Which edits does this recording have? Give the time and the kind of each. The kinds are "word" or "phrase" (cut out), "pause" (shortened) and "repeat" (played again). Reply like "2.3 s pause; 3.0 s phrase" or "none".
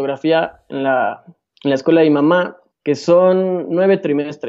2.7 s pause